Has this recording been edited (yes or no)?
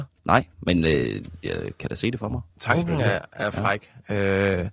yes